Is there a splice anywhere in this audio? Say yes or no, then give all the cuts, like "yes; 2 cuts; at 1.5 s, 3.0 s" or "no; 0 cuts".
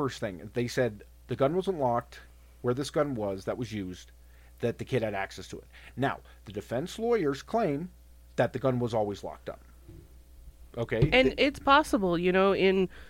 no; 0 cuts